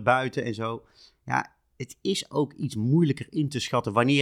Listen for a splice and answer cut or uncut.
uncut